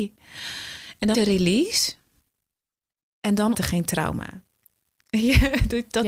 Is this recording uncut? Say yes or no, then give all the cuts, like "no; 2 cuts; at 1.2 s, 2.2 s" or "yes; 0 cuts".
no; 2 cuts; at 1.1 s, 3.5 s